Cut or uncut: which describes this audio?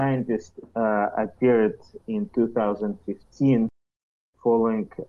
uncut